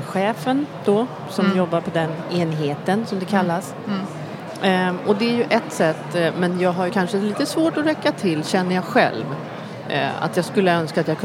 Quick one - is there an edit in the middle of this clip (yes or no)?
yes